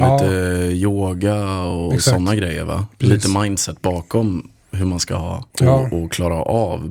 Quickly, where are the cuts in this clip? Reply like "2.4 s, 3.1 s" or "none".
5.5 s